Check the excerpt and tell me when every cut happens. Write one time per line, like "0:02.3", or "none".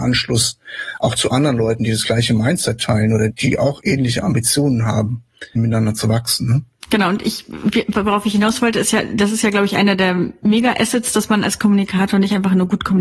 0:03.3
0:05.6

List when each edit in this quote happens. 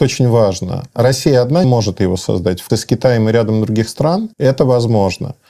0:01.6
0:02.7
0:04.3

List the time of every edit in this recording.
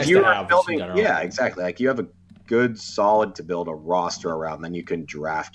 0:03.3

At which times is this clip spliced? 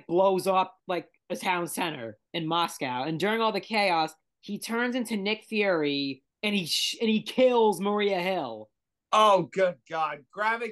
0:02.3
0:06.3

